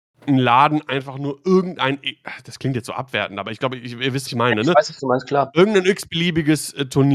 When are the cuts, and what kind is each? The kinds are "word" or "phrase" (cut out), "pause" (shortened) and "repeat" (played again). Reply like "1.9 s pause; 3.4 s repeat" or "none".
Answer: 4.3 s word